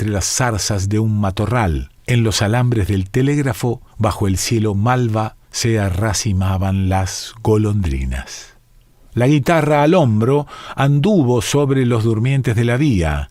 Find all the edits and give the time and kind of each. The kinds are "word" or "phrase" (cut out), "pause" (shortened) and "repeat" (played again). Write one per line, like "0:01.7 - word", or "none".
0:02.0 - pause
0:03.9 - pause
0:05.4 - pause
0:08.8 - pause

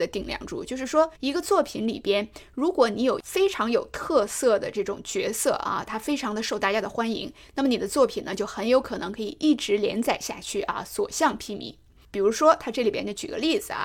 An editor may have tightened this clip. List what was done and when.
0:01.1 - pause

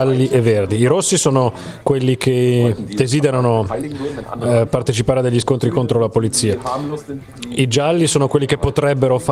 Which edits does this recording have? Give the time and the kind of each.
none

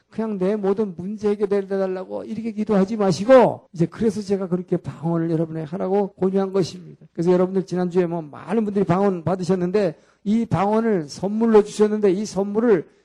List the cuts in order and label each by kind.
0:03.7 - pause
0:06.1 - pause
0:07.1 - pause

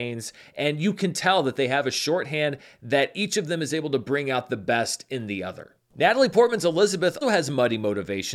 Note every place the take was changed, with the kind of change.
0:07.2 - word

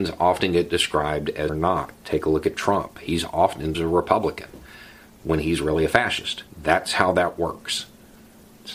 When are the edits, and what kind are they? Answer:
0:01.5 - phrase
0:03.7 - phrase
0:06.5 - pause

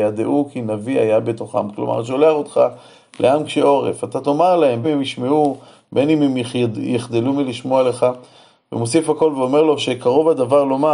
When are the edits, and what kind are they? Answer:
0:04.8 - phrase

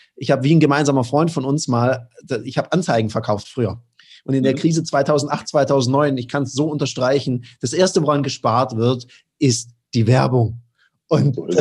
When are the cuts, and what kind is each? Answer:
none

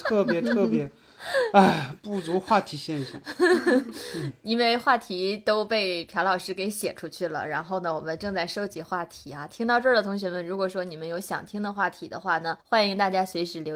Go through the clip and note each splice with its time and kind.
0:12.6 - pause

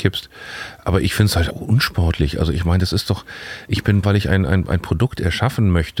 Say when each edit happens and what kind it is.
0:01.5 - word
0:04.0 - word

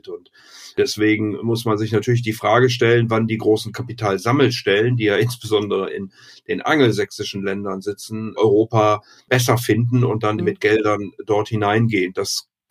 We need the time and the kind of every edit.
0:08.4 - word
0:10.4 - word

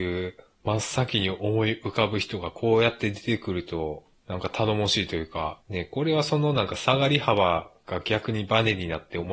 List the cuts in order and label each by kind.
0:05.6 - pause

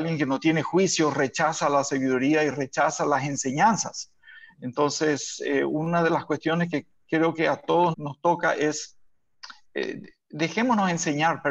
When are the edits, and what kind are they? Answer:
0:07.9 - word

